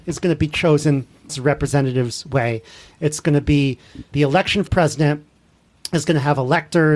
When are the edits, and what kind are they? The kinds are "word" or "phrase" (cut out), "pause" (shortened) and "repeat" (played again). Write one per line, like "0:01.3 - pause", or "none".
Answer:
0:01.3 - word
0:04.1 - word
0:04.7 - word